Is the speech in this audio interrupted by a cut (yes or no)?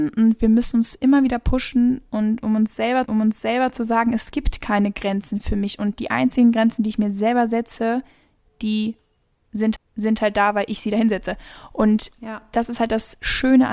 yes